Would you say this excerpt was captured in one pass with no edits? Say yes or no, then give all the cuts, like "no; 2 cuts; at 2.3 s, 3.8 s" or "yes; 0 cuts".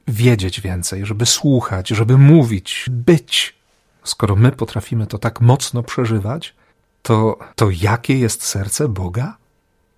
no; 2 cuts; at 2.9 s, 7.5 s